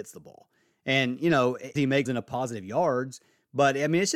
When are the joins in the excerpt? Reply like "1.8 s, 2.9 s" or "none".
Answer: 1.8 s, 2.1 s